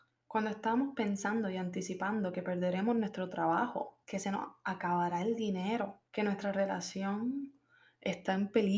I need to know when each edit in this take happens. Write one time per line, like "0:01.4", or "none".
0:04.0
0:06.1